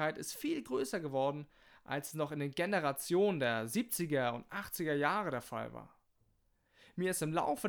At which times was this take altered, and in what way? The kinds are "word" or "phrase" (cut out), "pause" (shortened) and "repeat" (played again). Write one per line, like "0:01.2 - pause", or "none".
none